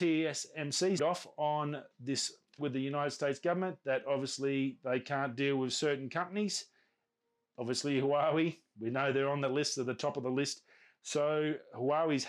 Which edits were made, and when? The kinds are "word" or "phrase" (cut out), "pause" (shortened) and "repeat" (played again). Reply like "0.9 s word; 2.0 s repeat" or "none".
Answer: 1.0 s word; 2.6 s word